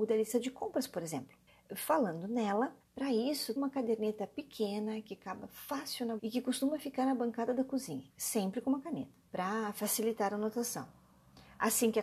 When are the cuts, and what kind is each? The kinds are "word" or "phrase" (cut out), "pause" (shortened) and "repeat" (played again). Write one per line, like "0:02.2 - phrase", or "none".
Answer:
0:01.5 - pause
0:02.8 - pause
0:03.6 - word
0:06.2 - word
0:08.1 - pause
0:09.2 - pause